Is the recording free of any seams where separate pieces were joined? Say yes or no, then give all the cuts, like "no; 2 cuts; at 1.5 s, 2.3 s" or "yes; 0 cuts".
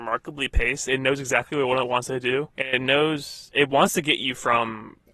no; 1 cut; at 2.5 s